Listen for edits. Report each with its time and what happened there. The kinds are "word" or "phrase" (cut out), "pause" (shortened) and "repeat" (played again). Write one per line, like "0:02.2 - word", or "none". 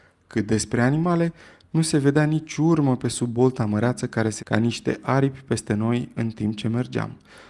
0:04.4 - word